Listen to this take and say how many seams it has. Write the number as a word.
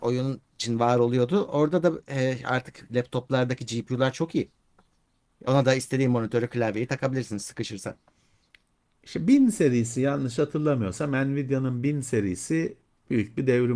zero